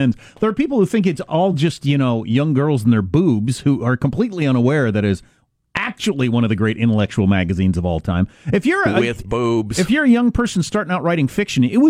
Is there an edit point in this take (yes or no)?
no